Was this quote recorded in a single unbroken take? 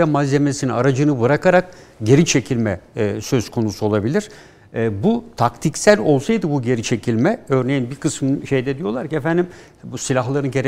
yes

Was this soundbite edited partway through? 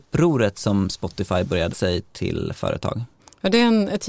yes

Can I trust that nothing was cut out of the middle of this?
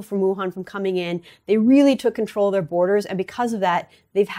yes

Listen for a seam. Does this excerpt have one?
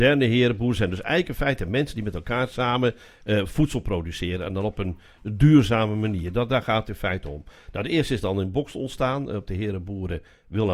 no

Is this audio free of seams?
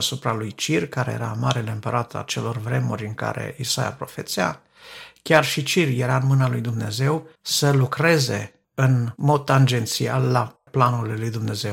no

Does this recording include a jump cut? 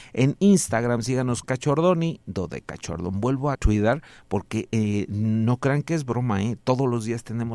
yes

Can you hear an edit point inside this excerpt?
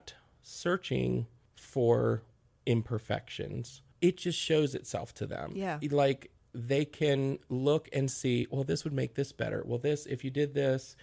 no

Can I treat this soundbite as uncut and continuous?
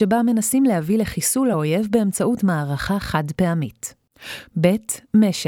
yes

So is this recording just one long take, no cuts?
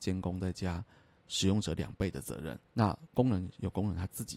no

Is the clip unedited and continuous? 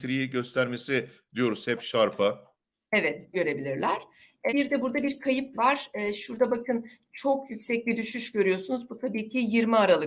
no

